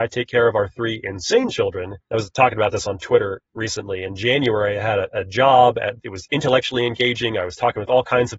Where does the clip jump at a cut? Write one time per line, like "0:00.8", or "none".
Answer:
0:02.0
0:06.0